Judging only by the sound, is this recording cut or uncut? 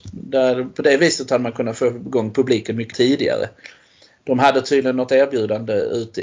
cut